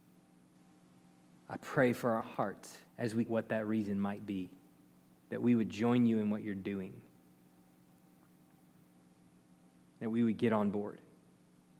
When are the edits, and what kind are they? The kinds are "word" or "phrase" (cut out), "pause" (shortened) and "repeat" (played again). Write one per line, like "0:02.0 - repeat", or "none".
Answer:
0:02.2 - word
0:02.9 - pause
0:03.3 - word
0:05.1 - pause